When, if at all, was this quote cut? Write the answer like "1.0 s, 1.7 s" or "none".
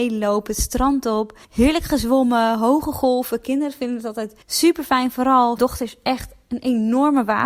1.4 s, 4.4 s, 5.6 s